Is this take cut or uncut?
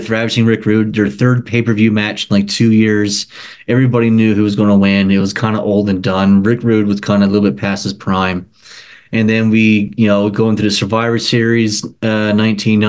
uncut